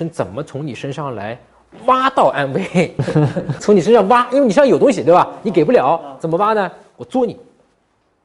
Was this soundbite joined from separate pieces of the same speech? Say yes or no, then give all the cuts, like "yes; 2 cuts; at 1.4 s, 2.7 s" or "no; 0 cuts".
yes; 1 cut; at 6.2 s